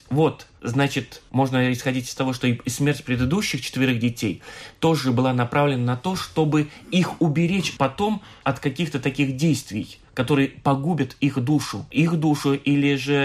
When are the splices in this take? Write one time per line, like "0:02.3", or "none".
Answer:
0:08.4